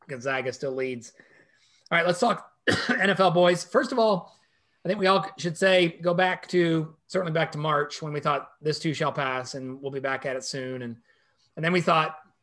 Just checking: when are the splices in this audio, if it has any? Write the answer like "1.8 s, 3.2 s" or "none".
none